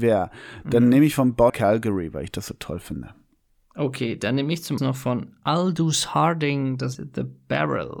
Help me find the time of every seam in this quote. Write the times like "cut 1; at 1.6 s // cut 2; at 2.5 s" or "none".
cut 1; at 1.5 s // cut 2; at 4.8 s // cut 3; at 6.9 s